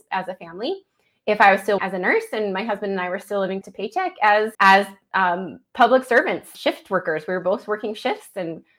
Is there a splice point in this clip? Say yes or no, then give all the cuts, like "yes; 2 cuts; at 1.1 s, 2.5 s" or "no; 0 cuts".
yes; 5 cuts; at 1.8 s, 3.6 s, 4.5 s, 5.7 s, 6.5 s